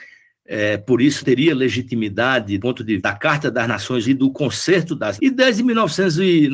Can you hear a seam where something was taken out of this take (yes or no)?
yes